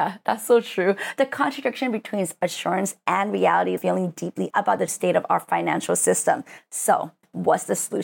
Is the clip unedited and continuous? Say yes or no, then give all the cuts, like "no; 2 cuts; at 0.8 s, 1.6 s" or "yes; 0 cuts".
no; 3 cuts; at 3.8 s, 4.5 s, 4.9 s